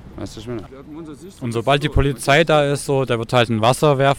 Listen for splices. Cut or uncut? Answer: uncut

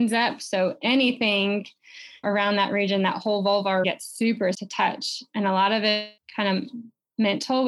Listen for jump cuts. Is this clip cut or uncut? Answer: cut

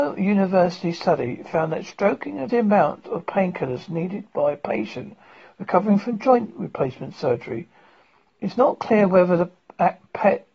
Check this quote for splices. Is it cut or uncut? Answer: cut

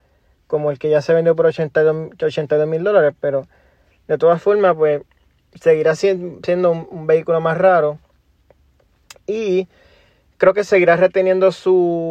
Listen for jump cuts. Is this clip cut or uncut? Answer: uncut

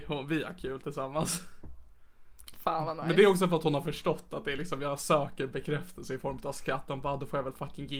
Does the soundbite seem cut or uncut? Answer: uncut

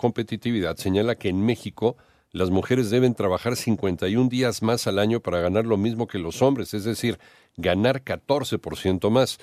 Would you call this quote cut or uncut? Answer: uncut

